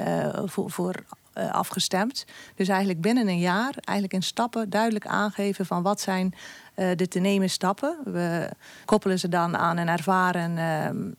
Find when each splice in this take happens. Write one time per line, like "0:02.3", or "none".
none